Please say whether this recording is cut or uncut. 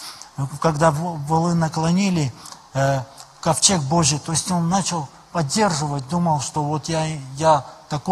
uncut